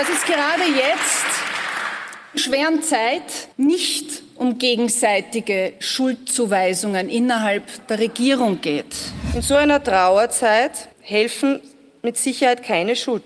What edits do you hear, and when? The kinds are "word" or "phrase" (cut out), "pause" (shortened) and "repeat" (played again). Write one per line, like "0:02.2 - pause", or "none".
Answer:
0:02.4 - word
0:03.5 - pause
0:10.9 - pause